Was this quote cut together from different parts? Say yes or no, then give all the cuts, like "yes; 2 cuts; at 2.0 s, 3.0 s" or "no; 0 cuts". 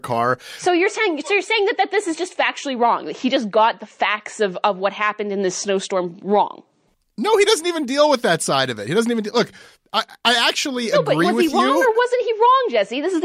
no; 0 cuts